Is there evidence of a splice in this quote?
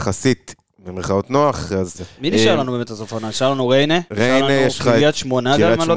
yes; 2 cuts; at 1.9 s, 4.1 s

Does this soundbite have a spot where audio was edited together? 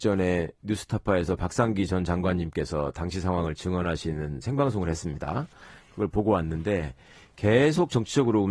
no; 0 cuts

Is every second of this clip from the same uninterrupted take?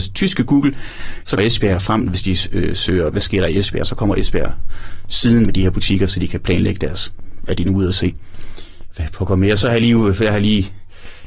no; 3 cuts; at 1.4 s, 3.1 s, 5.5 s

